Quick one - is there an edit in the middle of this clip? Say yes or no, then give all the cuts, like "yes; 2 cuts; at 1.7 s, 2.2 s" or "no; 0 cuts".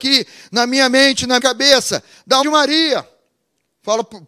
yes; 2 cuts; at 1.4 s, 2.4 s